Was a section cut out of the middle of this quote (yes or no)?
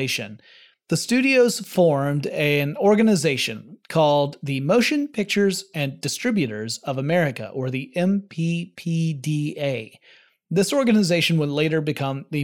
yes